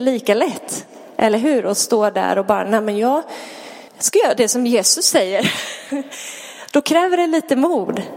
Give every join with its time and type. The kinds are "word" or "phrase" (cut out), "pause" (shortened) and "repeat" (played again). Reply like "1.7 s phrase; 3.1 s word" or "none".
3.9 s pause

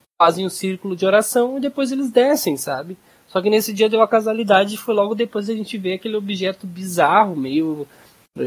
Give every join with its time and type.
none

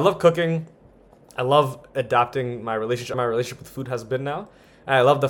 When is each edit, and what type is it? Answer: 3.1 s phrase

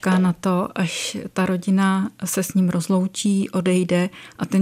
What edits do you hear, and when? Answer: none

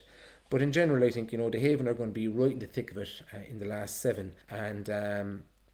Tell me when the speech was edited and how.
4.4 s pause

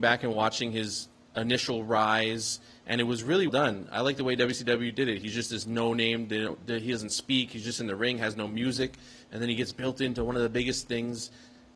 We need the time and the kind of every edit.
3.5 s word

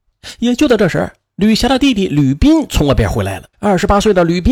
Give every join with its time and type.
3.5 s pause

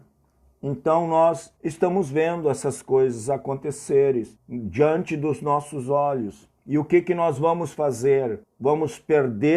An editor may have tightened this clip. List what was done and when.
1.6 s pause; 4.4 s pause; 6.6 s pause; 8.4 s pause

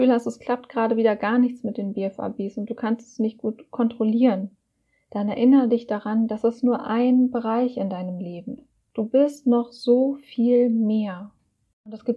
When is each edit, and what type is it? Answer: none

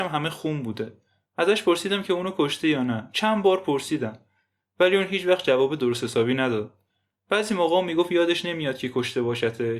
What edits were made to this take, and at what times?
none

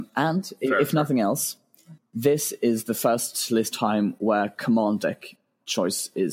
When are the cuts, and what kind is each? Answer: 3.7 s phrase

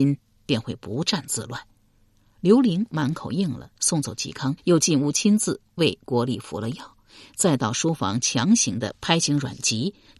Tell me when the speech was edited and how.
4.6 s pause

